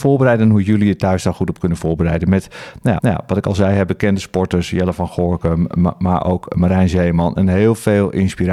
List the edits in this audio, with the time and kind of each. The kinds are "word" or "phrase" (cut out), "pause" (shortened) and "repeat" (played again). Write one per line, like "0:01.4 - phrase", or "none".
0:03.0 - repeat